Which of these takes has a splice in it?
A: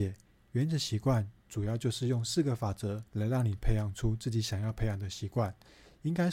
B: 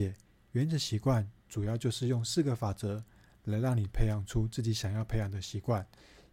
A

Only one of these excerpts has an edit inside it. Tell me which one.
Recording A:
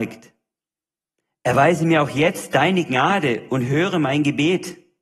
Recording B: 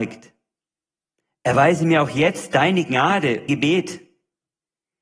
B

